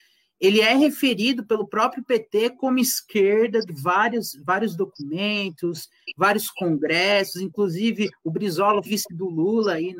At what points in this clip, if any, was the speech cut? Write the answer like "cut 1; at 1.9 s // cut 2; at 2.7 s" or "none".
cut 1; at 3.7 s // cut 2; at 8.8 s